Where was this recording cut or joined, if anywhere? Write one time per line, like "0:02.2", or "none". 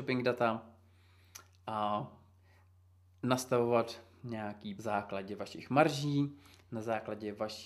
0:04.7